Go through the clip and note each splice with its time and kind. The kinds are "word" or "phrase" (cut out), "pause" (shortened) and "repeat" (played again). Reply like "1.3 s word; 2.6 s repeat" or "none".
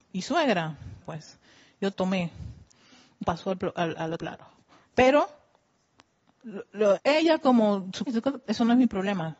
1.0 s word; 1.9 s word; 3.2 s word; 4.2 s word; 7.0 s word; 8.1 s word